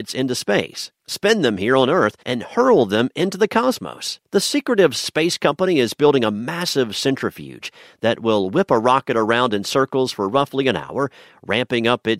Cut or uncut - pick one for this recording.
cut